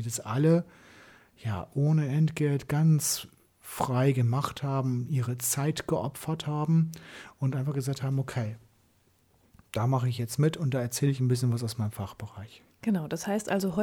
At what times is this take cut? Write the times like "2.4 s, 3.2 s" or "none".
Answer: none